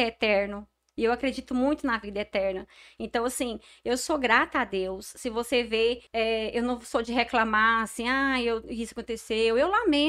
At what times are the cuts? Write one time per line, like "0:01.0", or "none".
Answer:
0:06.1